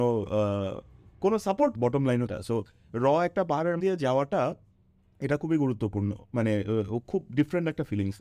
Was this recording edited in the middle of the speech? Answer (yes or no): yes